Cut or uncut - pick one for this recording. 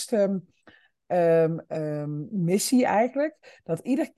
uncut